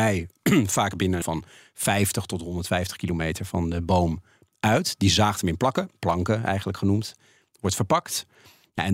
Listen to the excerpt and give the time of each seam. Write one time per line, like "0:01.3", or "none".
0:01.2